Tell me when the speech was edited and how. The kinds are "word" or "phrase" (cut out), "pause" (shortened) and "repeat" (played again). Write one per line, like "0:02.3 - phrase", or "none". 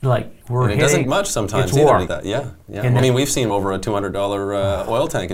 0:01.0 - word
0:02.1 - word
0:03.0 - word
0:03.5 - word